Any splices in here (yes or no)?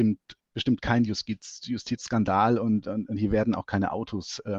yes